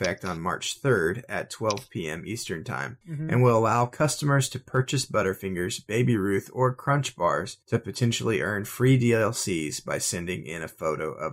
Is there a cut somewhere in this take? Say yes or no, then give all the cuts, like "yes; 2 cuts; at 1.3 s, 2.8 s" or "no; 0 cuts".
yes; 2 cuts; at 3.0 s, 7.6 s